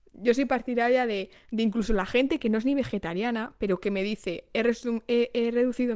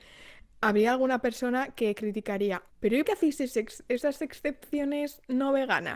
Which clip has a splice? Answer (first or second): second